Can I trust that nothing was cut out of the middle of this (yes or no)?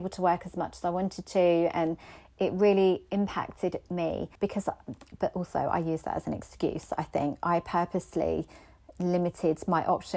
no